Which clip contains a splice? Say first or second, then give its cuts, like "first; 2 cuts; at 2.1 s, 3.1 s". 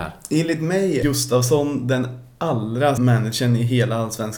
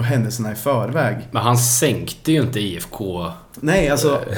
first; 2 cuts; at 1.0 s, 3.0 s